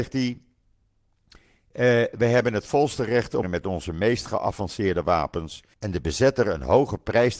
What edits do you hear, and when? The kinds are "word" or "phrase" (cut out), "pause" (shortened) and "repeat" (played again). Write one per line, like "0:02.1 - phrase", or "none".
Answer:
0:03.4 - phrase
0:05.7 - pause